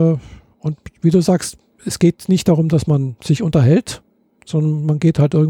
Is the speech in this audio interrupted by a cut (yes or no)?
no